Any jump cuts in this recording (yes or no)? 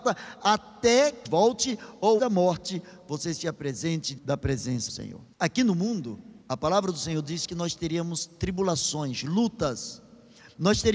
yes